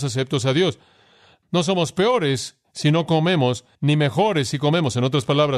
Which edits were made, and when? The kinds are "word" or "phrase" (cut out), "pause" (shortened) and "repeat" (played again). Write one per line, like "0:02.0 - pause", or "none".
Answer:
0:03.7 - pause